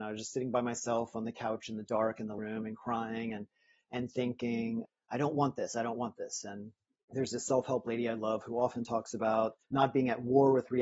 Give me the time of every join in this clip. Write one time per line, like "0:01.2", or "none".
0:02.4
0:09.6